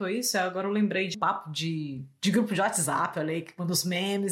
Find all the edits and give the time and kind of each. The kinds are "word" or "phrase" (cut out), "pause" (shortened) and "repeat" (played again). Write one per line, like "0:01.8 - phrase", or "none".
0:01.1 - word